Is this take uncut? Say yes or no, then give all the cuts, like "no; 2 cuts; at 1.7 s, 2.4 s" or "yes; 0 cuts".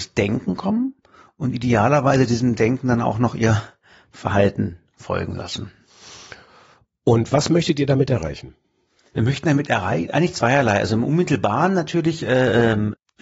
yes; 0 cuts